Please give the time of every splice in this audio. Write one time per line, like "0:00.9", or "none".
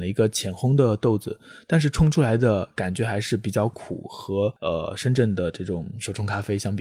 0:04.6